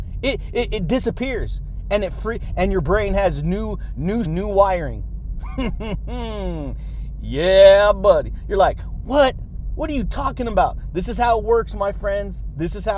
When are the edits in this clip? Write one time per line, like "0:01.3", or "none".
0:04.2